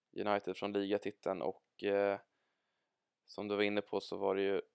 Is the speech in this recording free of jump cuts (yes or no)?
yes